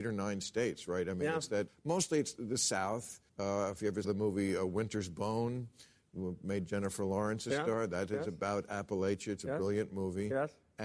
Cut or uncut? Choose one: cut